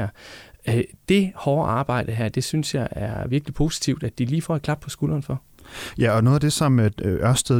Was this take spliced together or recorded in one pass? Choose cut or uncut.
uncut